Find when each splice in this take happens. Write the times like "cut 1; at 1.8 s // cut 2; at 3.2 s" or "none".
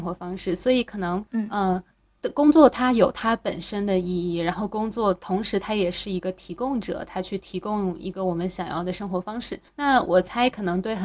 cut 1; at 1.3 s // cut 2; at 9.7 s